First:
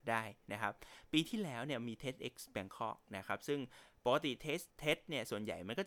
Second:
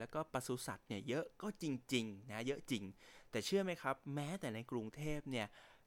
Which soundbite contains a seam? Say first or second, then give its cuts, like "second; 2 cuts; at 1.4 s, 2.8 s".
first; 1 cut; at 4.7 s